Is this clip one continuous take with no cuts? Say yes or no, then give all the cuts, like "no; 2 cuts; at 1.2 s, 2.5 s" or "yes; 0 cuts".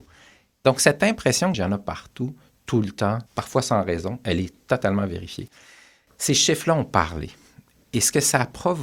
no; 2 cuts; at 1.5 s, 3.3 s